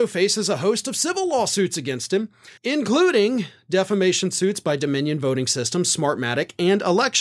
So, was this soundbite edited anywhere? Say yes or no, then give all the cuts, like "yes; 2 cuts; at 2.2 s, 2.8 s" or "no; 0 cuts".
yes; 1 cut; at 2.6 s